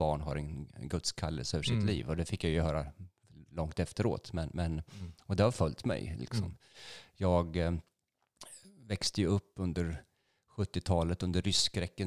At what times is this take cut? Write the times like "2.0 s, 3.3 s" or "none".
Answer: none